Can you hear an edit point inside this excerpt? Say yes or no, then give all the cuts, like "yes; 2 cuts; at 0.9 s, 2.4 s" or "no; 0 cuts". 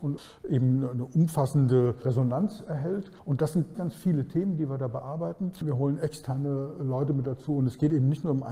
yes; 2 cuts; at 3.2 s, 3.7 s